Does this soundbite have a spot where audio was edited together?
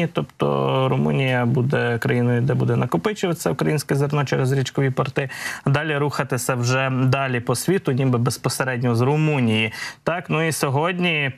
no; 0 cuts

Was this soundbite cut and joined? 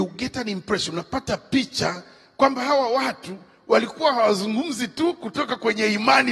no; 0 cuts

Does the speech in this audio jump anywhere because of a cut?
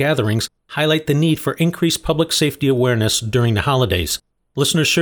no; 0 cuts

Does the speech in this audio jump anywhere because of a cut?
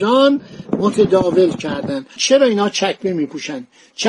yes; 1 cut; at 2.2 s

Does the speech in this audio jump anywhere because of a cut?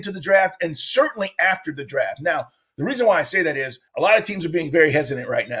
yes; 1 cut; at 3.9 s

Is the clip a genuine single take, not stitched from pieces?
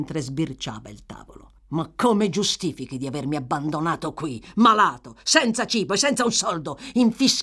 no; 1 cut; at 1.6 s

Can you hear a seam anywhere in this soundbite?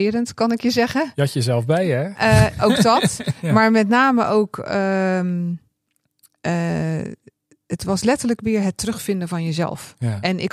no; 0 cuts

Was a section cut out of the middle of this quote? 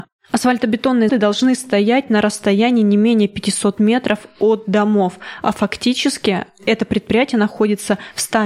yes; 1 cut; at 1.1 s

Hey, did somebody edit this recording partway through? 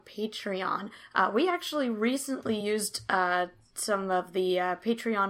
no; 0 cuts

